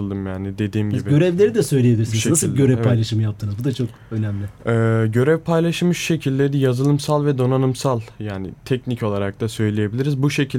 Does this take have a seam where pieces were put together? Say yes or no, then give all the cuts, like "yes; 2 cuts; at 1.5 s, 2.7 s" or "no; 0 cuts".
yes; 1 cut; at 8.6 s